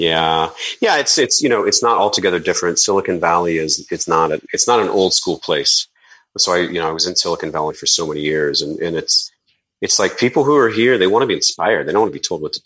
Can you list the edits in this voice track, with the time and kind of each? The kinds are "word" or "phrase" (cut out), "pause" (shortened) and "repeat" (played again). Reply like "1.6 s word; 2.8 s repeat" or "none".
none